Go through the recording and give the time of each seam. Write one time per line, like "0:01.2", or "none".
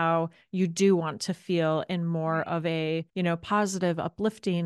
0:03.1